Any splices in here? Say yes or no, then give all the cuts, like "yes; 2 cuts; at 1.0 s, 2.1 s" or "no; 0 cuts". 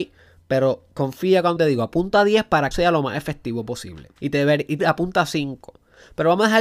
yes; 5 cuts; at 0.9 s, 1.6 s, 2.7 s, 4.2 s, 4.8 s